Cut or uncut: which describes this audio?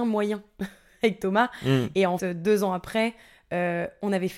cut